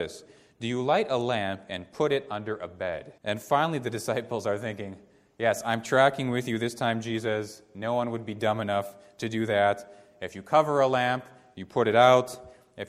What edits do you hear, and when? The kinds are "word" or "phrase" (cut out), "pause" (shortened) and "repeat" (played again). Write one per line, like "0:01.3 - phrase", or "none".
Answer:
0:03.2 - pause

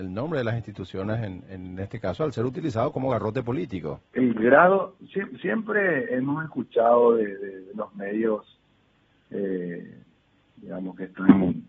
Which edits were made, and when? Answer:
0:04.1 - pause

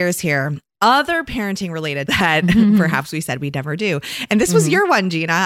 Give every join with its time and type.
0:02.1 - word

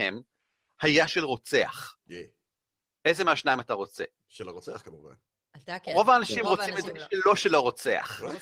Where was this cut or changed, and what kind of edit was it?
none

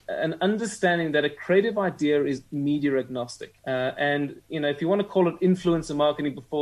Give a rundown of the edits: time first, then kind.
0:03.6 - pause

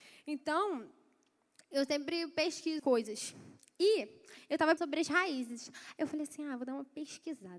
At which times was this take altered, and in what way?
0:02.8 - word
0:04.8 - word

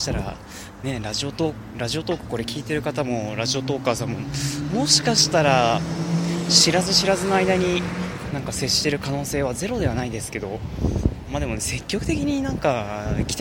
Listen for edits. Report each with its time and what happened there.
0:08.3 - word

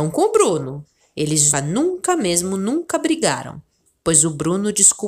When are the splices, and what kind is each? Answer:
0:01.5 - word

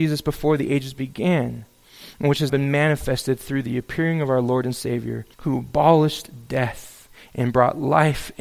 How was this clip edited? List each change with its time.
0:02.5 - word
0:05.3 - pause

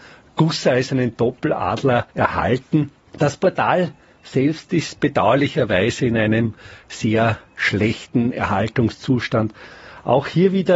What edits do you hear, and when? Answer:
0:02.1 - pause

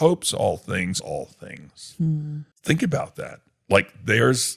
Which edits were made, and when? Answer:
0:01.0 - word
0:02.5 - pause

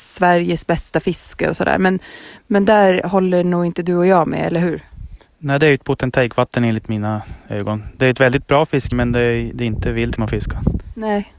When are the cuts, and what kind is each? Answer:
0:08.9 - word
0:10.2 - word

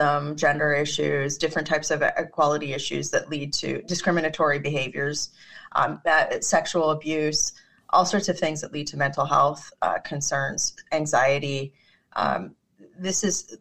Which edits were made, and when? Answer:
none

